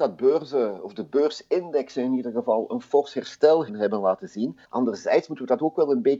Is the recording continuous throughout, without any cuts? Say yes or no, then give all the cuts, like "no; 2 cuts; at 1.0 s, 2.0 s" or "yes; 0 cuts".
no; 2 cuts; at 3.7 s, 4.6 s